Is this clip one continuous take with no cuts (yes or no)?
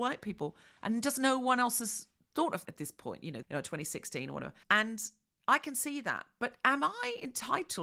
no